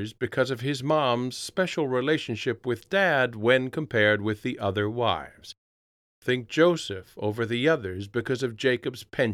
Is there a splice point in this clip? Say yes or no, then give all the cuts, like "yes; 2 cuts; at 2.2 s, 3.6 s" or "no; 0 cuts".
no; 0 cuts